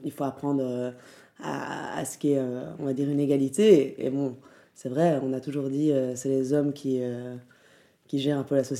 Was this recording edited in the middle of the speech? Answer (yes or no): no